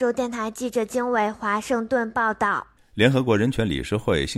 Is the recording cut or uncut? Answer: cut